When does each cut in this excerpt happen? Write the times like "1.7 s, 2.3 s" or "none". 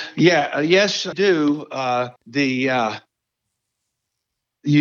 1.1 s, 2.2 s